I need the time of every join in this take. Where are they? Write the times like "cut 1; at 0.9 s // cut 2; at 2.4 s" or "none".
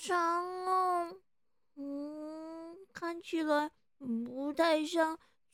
none